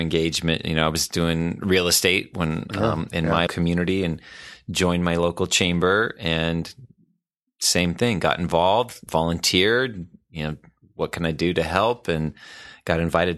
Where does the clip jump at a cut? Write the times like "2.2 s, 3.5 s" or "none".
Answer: 3.5 s, 9.1 s